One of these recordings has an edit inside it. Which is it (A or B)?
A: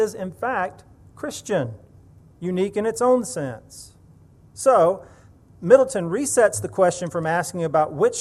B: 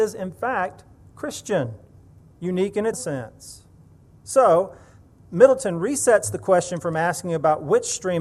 B